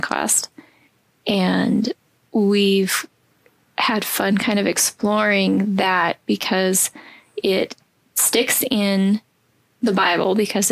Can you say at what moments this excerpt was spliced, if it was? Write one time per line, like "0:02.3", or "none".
none